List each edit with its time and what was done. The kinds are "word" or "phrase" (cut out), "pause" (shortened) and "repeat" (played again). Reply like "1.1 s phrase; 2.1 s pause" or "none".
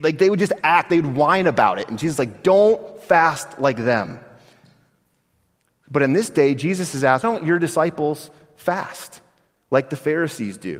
7.2 s word